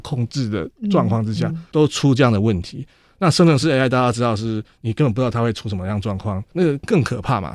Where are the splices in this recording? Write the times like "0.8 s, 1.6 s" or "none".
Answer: none